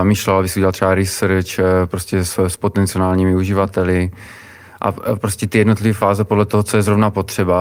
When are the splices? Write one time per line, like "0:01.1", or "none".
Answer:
none